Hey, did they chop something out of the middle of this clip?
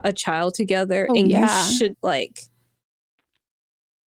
yes; 2 cuts; at 1.1 s, 1.9 s

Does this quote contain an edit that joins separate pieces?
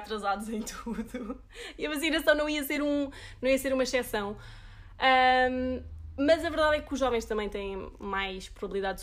no; 0 cuts

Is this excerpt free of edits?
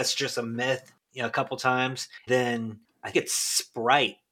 no; 2 cuts; at 2.3 s, 3.1 s

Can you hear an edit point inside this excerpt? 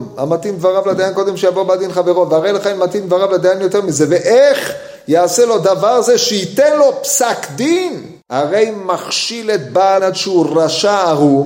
yes; 2 cuts; at 8.2 s, 10.0 s

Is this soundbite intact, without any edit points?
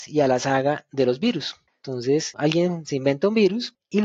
yes; 0 cuts

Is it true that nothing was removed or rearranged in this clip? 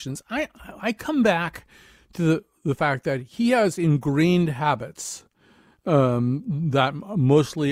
yes; 0 cuts

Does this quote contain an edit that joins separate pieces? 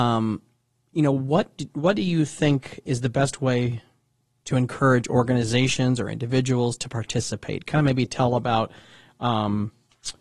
no; 0 cuts

